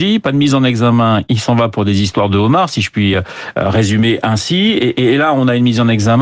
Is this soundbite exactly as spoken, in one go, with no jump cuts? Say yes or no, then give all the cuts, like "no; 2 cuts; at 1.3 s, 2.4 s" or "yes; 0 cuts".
yes; 0 cuts